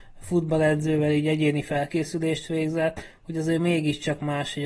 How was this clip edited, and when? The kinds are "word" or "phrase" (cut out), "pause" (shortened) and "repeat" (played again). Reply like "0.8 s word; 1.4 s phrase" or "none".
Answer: none